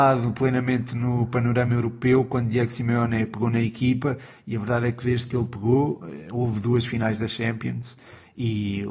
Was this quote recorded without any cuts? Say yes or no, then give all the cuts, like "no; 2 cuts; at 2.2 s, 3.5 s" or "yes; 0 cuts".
yes; 0 cuts